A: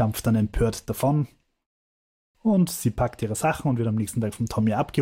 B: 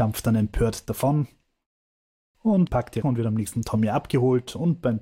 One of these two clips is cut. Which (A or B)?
B